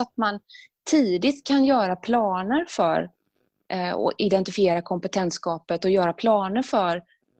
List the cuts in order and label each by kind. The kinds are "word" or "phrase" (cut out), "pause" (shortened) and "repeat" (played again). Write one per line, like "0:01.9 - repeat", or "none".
none